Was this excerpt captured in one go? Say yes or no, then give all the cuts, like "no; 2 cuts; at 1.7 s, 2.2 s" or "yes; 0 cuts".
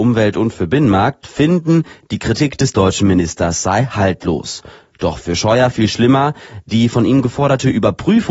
yes; 0 cuts